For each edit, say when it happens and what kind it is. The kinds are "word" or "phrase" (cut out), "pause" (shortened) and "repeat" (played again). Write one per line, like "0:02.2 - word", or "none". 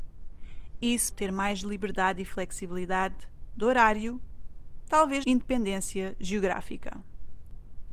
0:01.1 - word
0:04.9 - word
0:05.2 - word

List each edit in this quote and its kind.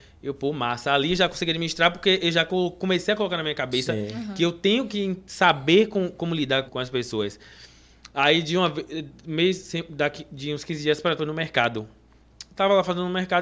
0:06.7 - word
0:11.2 - word

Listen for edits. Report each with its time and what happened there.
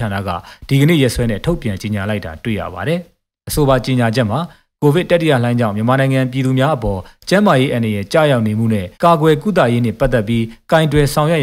0:08.9 - pause

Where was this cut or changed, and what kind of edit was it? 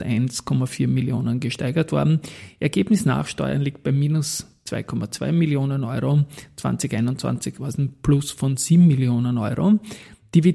none

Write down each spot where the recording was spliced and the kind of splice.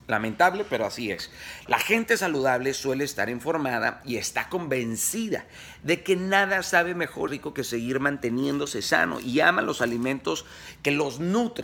0:07.3 - phrase

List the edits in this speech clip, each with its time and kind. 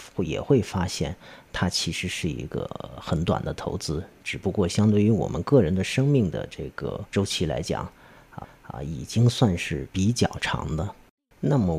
0:07.1 - pause
0:08.4 - repeat
0:09.9 - pause

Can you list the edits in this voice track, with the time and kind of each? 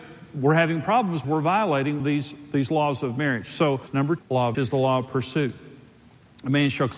0:01.2 - word
0:02.0 - word
0:04.2 - word
0:04.5 - word

